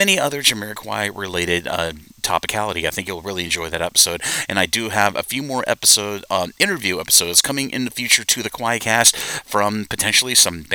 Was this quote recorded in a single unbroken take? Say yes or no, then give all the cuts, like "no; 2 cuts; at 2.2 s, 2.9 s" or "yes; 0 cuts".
yes; 0 cuts